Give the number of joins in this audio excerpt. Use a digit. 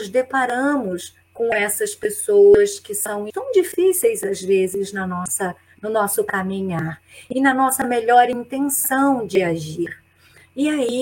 1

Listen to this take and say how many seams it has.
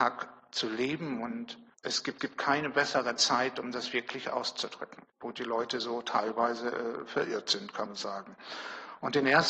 4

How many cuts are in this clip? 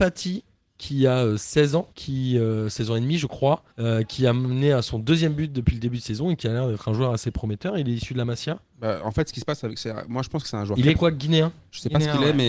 2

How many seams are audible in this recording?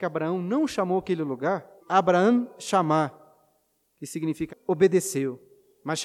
2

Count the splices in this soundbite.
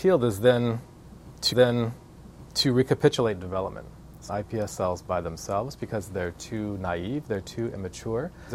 2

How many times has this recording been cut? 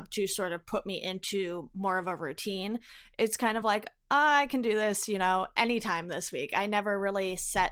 0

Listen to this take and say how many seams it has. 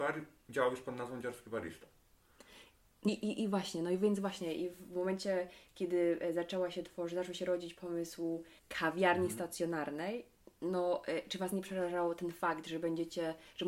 2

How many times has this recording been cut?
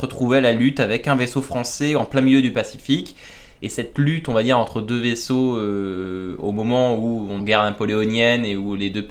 1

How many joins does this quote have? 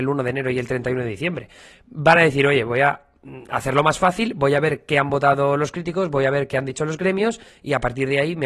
0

